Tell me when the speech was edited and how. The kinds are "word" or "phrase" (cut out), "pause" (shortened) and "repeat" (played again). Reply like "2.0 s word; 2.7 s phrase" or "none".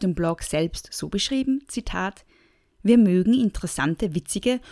none